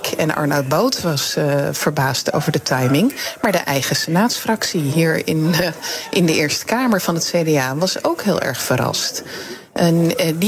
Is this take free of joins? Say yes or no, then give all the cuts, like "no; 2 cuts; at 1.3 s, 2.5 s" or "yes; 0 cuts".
yes; 0 cuts